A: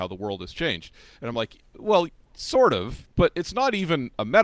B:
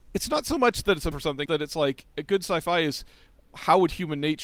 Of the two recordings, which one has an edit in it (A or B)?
B